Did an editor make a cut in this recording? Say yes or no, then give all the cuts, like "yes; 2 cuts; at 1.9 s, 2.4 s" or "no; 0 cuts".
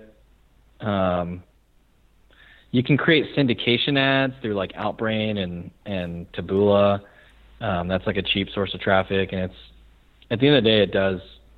no; 0 cuts